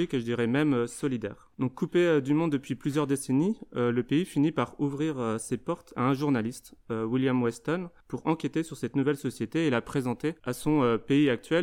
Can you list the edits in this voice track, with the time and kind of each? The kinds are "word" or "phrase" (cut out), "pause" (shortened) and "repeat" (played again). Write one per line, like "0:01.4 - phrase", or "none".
0:01.5 - pause
0:08.0 - pause
0:10.4 - pause